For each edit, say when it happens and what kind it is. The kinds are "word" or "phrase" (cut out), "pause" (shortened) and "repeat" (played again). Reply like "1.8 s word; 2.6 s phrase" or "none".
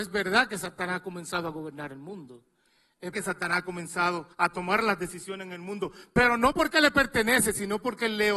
3.1 s word; 4.3 s pause